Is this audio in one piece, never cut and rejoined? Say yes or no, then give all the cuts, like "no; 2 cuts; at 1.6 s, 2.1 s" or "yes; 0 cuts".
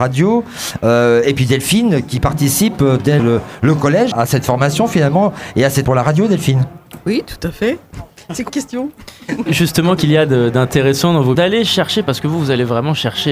no; 7 cuts; at 3.2 s, 4.1 s, 5.8 s, 8.5 s, 9.5 s, 10.0 s, 11.3 s